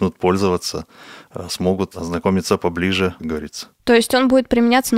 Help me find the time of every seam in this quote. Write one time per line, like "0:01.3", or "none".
0:03.2